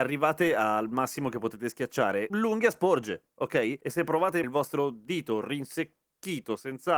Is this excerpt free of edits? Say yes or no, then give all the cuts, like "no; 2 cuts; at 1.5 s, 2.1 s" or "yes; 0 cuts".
no; 1 cut; at 4.4 s